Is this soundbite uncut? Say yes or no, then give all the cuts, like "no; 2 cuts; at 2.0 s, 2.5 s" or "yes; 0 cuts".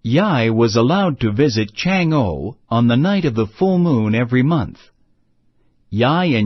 yes; 0 cuts